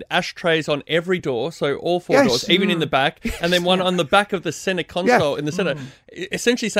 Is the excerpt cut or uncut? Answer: uncut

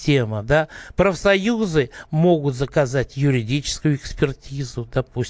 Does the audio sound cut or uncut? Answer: uncut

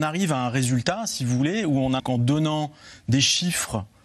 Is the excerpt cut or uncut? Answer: cut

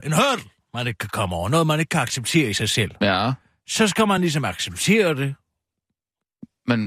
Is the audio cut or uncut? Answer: uncut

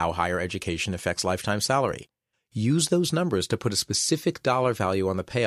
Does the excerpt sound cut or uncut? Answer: uncut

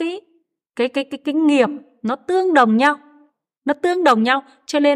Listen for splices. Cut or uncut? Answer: uncut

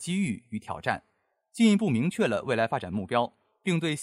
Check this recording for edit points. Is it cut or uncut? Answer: uncut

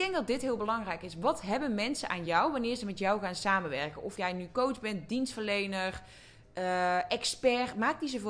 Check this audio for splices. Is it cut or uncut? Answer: uncut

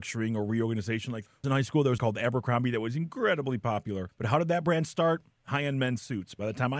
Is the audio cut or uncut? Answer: cut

